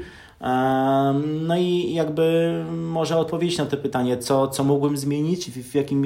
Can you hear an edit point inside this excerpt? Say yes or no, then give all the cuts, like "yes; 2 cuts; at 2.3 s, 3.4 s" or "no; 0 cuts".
no; 0 cuts